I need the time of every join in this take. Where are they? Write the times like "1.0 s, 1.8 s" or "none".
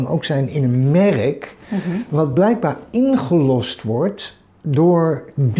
none